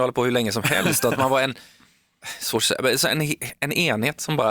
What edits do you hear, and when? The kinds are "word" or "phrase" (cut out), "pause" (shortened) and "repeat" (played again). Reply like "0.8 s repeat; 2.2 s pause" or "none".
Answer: none